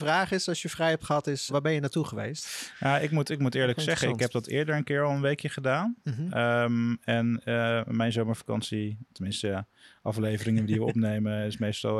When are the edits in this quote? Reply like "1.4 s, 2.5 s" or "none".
1.5 s